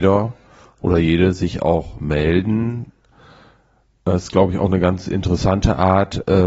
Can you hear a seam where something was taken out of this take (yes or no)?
no